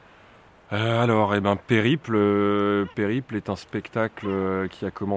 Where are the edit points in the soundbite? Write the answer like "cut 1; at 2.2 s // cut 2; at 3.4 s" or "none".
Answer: cut 1; at 2.9 s